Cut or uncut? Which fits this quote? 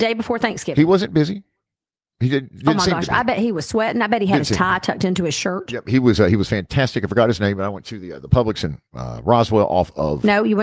uncut